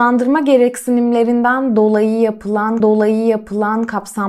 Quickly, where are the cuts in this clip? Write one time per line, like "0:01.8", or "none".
0:02.8